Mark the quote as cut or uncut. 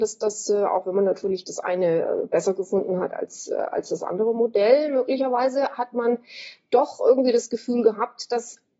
uncut